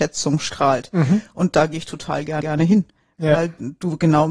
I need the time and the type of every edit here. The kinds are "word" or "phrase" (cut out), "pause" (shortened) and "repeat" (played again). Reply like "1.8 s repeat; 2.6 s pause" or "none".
2.4 s repeat